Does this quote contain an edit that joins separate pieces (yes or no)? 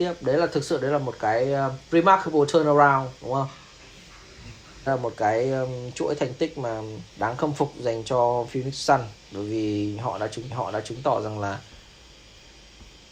yes